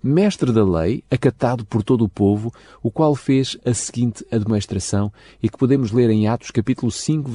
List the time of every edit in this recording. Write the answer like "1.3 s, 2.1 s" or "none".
none